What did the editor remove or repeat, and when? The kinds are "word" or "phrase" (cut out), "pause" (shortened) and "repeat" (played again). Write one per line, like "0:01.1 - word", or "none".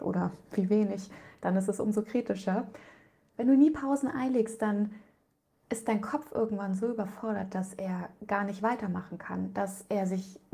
none